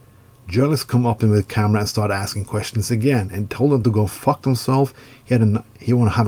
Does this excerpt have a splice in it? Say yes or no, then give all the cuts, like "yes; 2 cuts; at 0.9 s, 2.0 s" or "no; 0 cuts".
no; 0 cuts